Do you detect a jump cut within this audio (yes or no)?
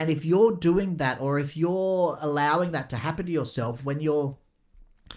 no